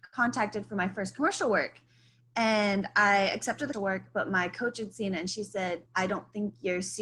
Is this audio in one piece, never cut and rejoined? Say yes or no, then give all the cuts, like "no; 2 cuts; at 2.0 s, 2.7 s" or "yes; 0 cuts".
no; 2 cuts; at 3.7 s, 5.9 s